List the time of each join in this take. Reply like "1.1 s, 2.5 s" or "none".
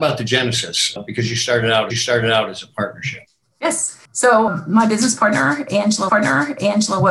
1.9 s, 3.4 s, 6.1 s